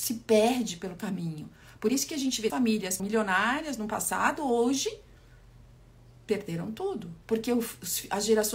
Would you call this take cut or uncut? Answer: cut